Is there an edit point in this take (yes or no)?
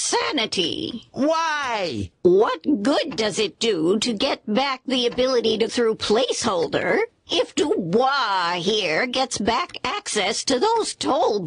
yes